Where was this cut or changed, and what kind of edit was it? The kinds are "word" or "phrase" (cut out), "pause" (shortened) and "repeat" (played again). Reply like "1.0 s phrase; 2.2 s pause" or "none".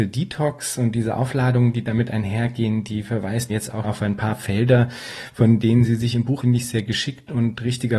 3.5 s word; 3.8 s word; 6.4 s word